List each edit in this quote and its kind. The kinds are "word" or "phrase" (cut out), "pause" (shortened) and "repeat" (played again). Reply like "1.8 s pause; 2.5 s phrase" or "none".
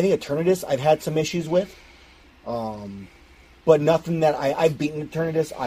none